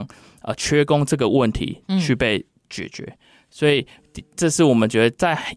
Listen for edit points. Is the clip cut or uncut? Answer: uncut